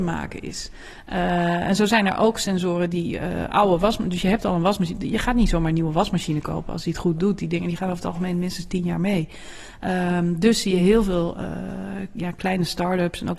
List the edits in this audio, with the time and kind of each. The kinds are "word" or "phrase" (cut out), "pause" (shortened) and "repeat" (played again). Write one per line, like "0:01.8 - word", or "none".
none